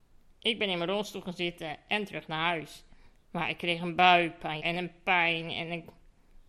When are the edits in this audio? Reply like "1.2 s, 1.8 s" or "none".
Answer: 4.6 s